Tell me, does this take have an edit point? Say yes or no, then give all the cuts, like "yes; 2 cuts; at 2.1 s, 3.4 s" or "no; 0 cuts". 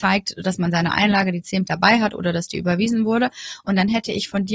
yes; 1 cut; at 1.7 s